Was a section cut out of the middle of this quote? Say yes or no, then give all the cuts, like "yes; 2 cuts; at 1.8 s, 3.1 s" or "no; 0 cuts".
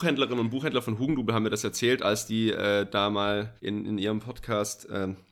yes; 1 cut; at 3.6 s